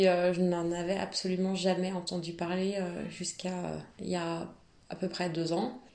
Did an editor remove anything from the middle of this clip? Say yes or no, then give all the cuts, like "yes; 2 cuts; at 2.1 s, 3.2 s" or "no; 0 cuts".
no; 0 cuts